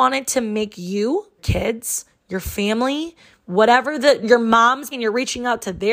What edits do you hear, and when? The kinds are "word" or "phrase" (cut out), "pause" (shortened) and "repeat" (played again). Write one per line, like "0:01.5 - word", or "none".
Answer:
0:01.4 - word
0:04.2 - word
0:04.9 - word